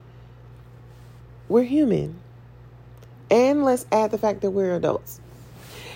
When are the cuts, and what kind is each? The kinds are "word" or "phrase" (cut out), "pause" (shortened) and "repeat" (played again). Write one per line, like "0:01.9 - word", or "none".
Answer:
none